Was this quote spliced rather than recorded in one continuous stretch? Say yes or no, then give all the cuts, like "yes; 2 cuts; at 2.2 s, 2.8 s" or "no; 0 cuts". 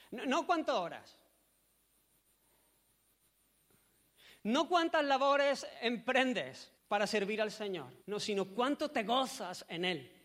yes; 2 cuts; at 6.8 s, 8.0 s